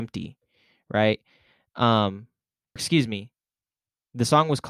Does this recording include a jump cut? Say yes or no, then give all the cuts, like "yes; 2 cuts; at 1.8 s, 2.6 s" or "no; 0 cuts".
yes; 1 cut; at 2.8 s